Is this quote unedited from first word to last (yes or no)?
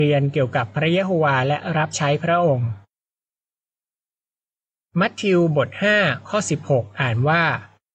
yes